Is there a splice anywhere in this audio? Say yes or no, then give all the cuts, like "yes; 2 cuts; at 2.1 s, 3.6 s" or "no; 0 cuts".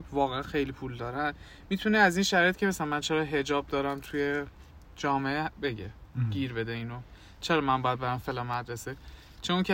no; 0 cuts